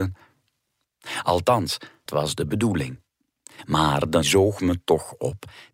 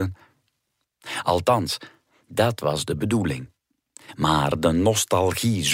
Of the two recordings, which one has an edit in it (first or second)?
first